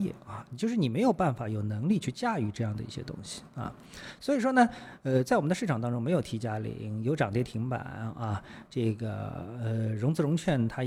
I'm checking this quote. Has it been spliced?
no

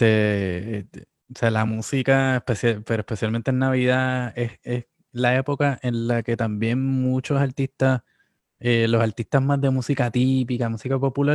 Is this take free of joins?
yes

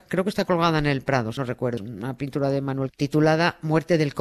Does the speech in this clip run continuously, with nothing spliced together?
no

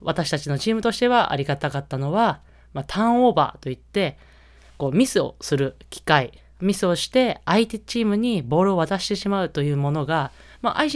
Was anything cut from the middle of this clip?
no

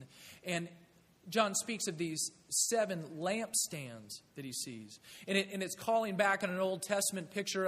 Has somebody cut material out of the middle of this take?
yes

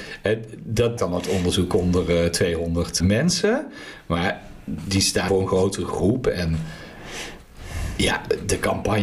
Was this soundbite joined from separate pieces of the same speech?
yes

